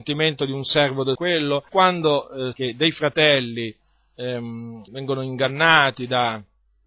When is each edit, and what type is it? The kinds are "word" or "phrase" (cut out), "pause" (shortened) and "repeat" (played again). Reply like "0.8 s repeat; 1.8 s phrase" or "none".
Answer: 1.2 s word; 1.7 s word; 2.5 s word; 4.9 s word